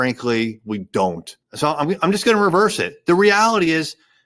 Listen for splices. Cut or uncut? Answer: cut